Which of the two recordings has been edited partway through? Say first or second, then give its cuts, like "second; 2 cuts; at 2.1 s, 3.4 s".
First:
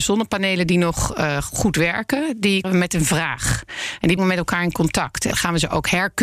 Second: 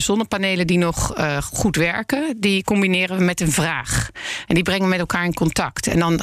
first; 3 cuts; at 2.6 s, 4.2 s, 5.3 s